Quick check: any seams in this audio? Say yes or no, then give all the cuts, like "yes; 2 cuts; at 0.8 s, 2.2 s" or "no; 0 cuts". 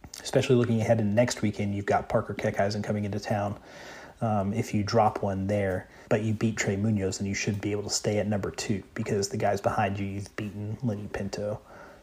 yes; 1 cut; at 6.0 s